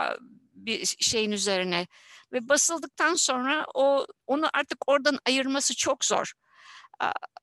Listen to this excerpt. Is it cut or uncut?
uncut